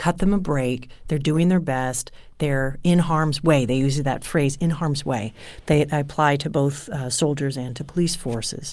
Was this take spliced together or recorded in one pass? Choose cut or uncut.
uncut